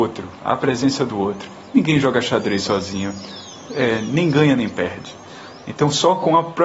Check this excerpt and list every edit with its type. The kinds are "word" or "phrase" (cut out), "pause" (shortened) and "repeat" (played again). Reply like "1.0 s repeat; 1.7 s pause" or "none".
none